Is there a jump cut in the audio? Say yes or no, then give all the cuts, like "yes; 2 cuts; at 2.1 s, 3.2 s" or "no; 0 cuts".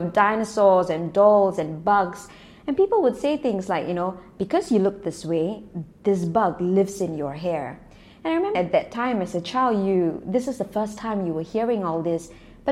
yes; 1 cut; at 8.5 s